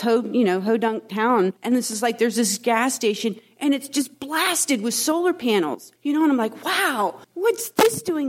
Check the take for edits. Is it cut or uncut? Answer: cut